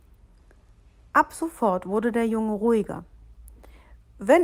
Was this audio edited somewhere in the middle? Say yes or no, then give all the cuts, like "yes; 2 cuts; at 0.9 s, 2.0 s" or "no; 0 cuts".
no; 0 cuts